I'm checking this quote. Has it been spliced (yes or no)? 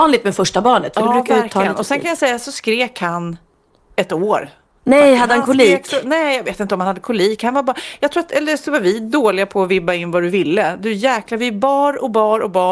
no